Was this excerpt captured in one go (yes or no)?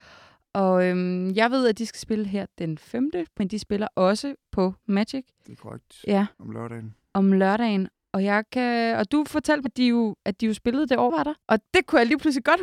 no